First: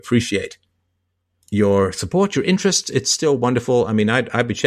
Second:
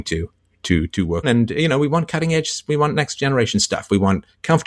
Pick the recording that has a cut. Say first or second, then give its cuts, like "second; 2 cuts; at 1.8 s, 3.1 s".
second; 1 cut; at 1.2 s